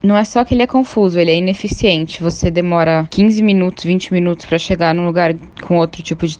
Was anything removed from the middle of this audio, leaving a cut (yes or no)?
no